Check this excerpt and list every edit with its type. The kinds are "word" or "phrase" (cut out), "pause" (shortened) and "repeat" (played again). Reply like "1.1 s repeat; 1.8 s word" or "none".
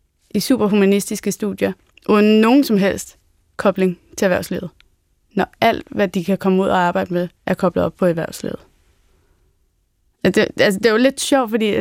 1.9 s pause; 7.4 s pause